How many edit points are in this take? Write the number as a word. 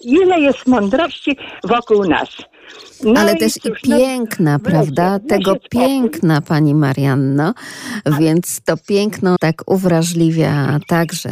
one